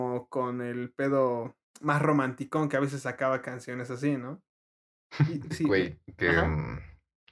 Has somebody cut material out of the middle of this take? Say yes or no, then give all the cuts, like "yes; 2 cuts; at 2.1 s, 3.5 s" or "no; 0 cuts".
yes; 1 cut; at 5.5 s